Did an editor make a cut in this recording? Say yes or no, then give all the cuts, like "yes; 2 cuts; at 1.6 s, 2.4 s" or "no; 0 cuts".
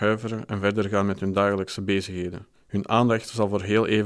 yes; 1 cut; at 2.5 s